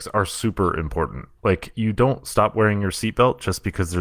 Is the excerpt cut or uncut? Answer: cut